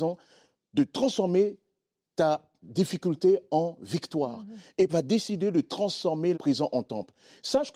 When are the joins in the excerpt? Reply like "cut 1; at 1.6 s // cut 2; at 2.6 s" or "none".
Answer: cut 1; at 2.6 s // cut 2; at 4.9 s // cut 3; at 6.3 s